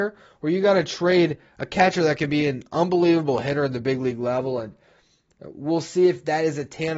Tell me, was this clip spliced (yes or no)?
no